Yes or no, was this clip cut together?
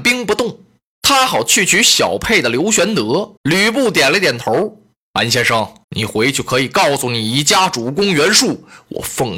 yes